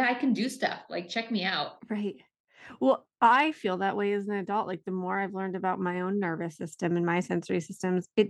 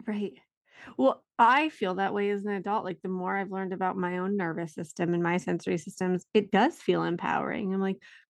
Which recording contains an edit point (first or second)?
first